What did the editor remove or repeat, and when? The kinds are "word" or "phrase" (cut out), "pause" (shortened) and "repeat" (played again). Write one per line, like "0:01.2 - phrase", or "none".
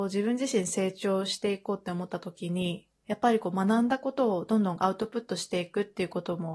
0:03.0 - pause